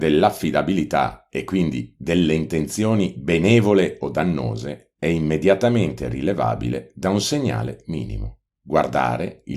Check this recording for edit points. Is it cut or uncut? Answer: uncut